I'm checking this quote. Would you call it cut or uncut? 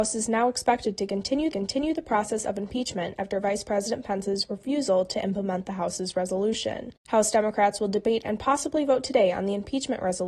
cut